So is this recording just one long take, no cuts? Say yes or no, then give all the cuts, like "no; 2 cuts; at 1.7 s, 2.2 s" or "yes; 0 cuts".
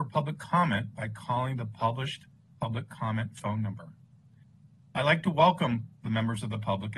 yes; 0 cuts